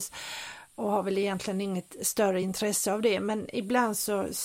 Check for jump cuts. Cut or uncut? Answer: uncut